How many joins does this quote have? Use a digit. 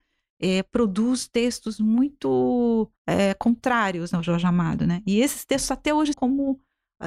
2